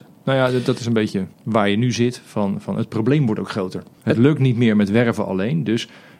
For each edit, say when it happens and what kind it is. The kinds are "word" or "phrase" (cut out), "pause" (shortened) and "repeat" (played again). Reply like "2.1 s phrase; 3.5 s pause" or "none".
1.3 s pause; 4.0 s pause